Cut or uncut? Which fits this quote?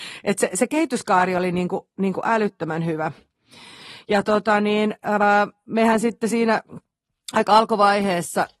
uncut